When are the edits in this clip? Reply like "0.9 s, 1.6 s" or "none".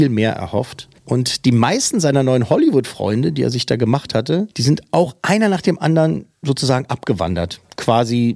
1.0 s, 4.5 s, 6.3 s